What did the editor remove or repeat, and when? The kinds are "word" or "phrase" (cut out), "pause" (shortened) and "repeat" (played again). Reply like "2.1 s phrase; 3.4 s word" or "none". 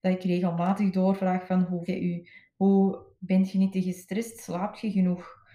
1.9 s word; 3.2 s word